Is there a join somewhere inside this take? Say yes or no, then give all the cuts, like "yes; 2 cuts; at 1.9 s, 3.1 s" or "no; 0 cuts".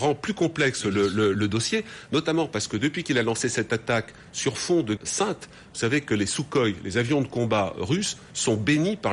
yes; 2 cuts; at 1.3 s, 5.0 s